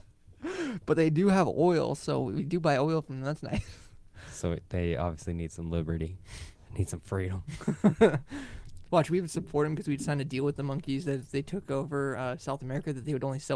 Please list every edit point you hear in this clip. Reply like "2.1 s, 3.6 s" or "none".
none